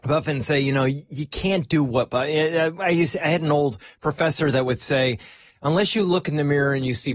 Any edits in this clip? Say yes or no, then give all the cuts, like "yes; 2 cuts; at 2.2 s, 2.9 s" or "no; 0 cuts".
no; 0 cuts